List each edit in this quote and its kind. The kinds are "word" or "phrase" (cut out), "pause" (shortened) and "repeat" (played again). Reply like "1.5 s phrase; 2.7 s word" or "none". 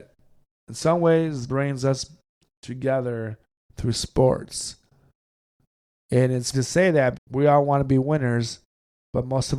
1.5 s word; 6.5 s word; 7.1 s word